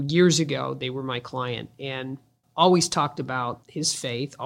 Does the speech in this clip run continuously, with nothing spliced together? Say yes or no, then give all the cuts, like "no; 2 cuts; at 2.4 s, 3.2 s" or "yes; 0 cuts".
yes; 0 cuts